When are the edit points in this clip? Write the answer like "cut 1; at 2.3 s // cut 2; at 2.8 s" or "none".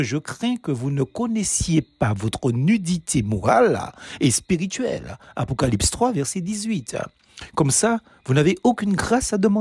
none